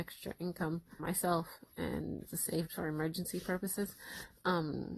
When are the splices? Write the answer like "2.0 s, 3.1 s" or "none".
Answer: 1.0 s, 2.3 s, 2.7 s